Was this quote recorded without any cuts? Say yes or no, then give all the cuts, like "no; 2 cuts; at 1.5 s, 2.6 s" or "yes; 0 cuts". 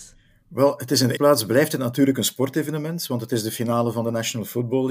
no; 1 cut; at 1.2 s